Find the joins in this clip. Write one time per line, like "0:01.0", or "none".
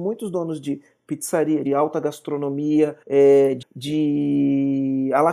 0:01.7
0:03.0
0:03.6